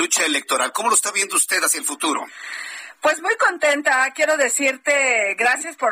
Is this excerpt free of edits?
yes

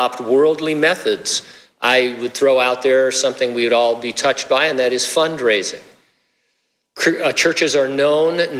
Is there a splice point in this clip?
no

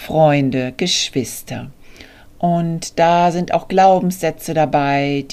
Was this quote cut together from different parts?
no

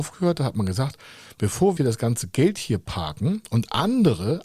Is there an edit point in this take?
yes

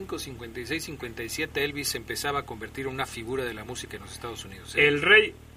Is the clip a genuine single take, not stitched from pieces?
yes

